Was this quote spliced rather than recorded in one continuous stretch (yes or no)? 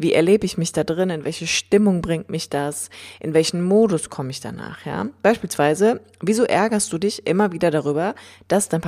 no